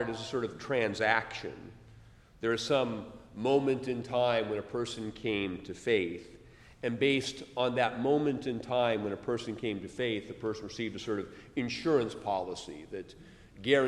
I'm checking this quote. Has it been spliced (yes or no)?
no